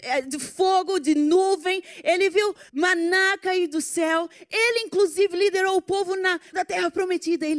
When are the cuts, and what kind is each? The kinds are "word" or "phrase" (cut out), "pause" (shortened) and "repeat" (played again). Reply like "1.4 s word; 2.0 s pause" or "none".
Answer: 2.7 s pause; 6.5 s word

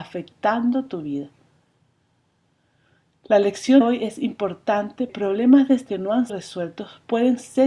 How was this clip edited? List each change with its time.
3.8 s word; 5.1 s word; 5.9 s word; 6.3 s word

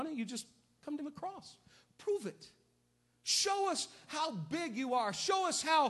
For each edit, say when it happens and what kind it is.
1.0 s phrase

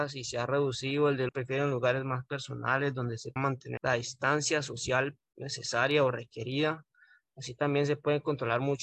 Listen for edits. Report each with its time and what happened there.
1.3 s phrase; 3.4 s word; 3.8 s word

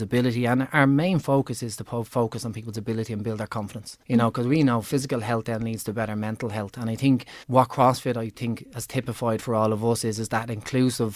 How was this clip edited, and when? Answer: 4.0 s pause; 7.4 s pause

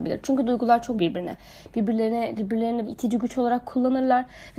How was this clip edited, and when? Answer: 1.0 s word; 2.4 s word; 2.8 s word

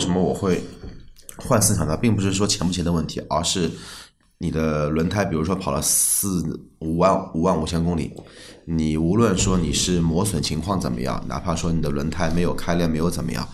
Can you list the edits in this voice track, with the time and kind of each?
none

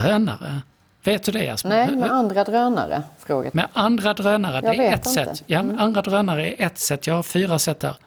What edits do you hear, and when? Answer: none

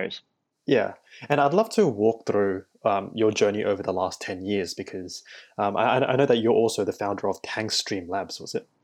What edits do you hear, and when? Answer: none

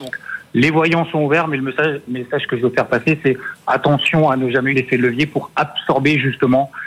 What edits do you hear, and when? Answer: 4.7 s word

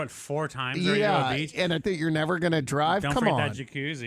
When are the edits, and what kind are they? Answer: 1.8 s word

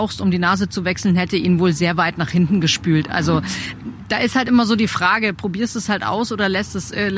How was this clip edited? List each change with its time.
none

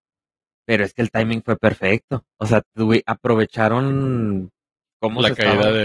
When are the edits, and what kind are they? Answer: 2.3 s pause

